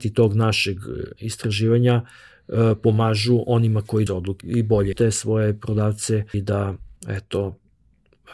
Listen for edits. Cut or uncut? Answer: cut